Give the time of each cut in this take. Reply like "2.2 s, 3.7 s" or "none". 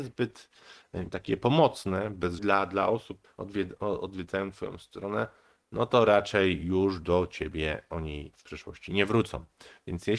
2.4 s, 3.2 s